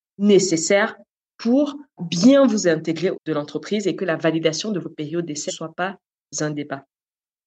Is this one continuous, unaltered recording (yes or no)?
no